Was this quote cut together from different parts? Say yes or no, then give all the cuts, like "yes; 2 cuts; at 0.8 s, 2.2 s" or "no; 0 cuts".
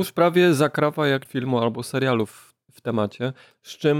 yes; 1 cut; at 1.3 s